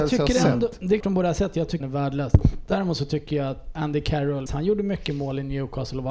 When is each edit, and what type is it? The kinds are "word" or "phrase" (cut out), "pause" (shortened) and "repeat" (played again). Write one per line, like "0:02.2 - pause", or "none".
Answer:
0:01.0 - word
0:01.8 - phrase
0:03.8 - word
0:04.5 - word